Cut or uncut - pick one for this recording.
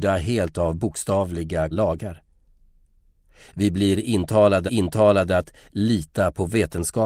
cut